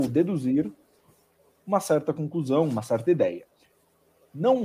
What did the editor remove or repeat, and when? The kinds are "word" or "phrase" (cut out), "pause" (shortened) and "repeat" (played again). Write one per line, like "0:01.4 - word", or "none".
none